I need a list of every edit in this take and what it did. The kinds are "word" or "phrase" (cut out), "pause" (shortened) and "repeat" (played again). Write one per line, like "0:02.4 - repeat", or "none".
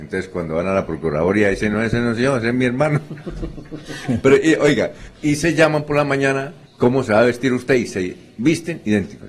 none